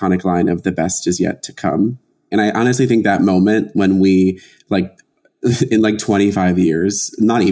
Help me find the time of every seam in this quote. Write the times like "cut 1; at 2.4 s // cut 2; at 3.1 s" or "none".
none